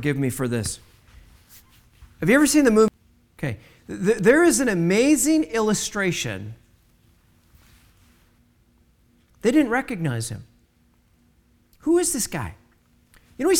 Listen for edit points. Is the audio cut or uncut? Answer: uncut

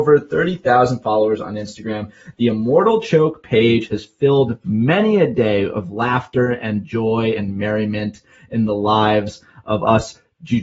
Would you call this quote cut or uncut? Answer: uncut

